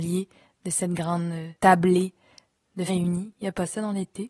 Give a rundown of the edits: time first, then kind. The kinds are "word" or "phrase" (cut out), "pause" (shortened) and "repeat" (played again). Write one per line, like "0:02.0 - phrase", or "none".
0:01.6 - pause
0:02.9 - word